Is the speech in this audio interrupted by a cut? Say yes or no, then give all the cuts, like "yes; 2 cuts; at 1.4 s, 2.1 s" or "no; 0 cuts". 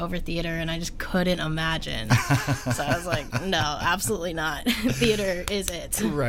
no; 0 cuts